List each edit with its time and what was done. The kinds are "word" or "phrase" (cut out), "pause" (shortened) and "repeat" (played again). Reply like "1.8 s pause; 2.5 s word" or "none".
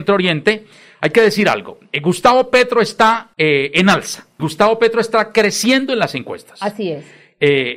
3.3 s pause; 4.4 s phrase